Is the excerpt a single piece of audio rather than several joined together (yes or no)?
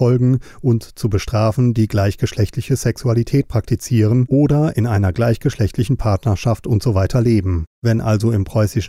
no